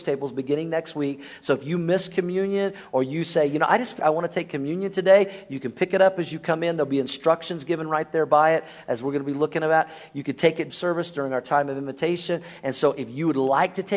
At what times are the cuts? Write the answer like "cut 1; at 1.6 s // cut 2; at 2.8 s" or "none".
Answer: cut 1; at 4.0 s // cut 2; at 10.7 s

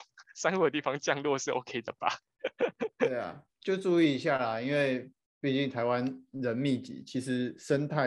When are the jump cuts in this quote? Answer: none

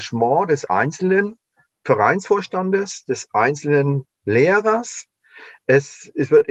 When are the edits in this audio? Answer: none

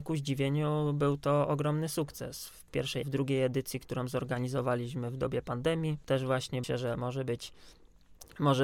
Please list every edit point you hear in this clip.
cut 1; at 3.0 s // cut 2; at 6.6 s

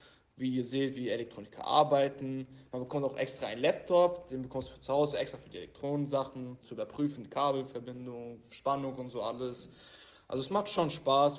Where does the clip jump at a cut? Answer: cut 1; at 6.6 s

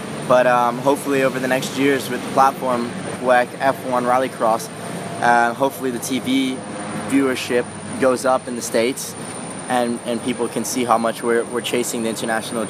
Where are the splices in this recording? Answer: cut 1; at 3.2 s

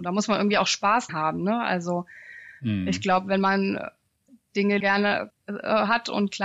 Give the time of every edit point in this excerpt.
cut 1; at 1.1 s // cut 2; at 4.8 s // cut 3; at 5.3 s

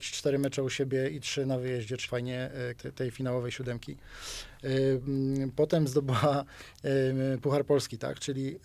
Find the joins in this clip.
cut 1; at 2.1 s // cut 2; at 2.8 s

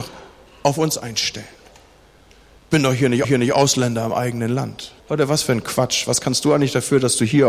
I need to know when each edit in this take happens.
cut 1; at 3.2 s // cut 2; at 5.0 s

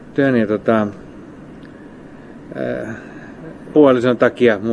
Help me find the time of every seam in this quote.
cut 1; at 3.7 s

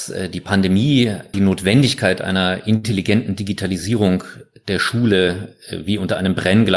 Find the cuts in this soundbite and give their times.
cut 1; at 1.3 s

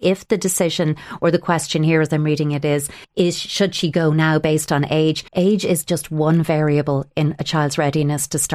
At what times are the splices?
cut 1; at 3.0 s // cut 2; at 5.3 s

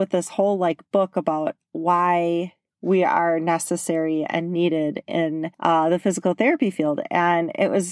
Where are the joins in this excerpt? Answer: cut 1; at 5.5 s

